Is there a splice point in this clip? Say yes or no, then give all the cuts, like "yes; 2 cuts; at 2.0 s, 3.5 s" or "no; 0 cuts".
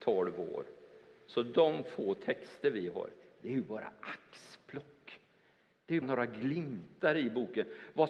yes; 1 cut; at 6.0 s